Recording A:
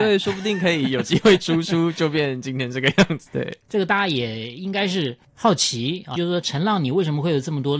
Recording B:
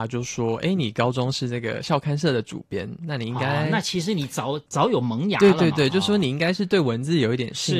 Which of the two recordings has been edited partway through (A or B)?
A